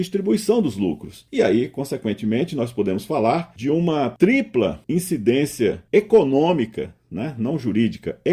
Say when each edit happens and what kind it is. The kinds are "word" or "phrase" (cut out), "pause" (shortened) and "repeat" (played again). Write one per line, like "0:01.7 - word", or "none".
none